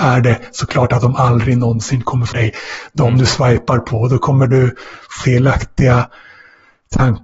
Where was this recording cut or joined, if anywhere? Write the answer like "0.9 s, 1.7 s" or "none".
2.3 s, 5.2 s